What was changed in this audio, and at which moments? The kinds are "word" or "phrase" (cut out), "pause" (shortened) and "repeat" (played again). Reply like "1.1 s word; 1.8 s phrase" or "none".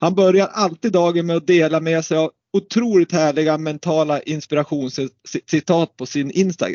none